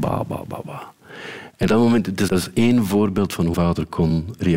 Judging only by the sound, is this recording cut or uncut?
cut